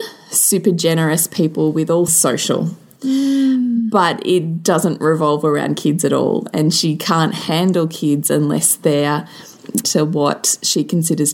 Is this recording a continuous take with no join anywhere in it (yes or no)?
no